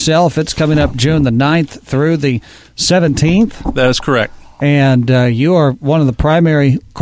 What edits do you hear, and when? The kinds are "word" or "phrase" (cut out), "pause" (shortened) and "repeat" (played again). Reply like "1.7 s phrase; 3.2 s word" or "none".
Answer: none